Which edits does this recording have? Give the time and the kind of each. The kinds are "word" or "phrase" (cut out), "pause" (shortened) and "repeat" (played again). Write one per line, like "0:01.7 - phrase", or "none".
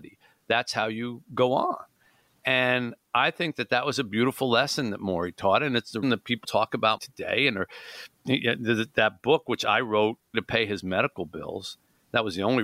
0:06.0 - word
0:06.4 - word
0:07.0 - word
0:10.3 - word